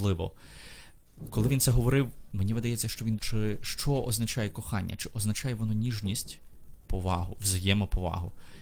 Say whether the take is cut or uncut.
cut